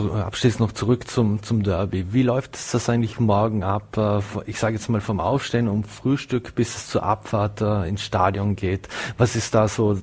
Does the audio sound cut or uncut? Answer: uncut